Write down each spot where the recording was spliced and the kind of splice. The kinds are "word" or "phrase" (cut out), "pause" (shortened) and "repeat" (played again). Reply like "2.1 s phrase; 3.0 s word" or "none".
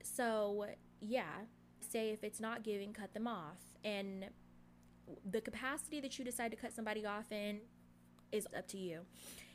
1.8 s word; 8.5 s word